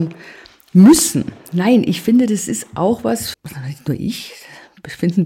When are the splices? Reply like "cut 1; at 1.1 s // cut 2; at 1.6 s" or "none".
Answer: cut 1; at 3.3 s